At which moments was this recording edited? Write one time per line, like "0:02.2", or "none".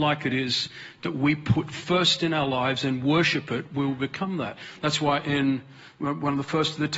none